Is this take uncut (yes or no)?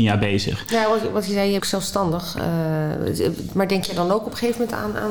no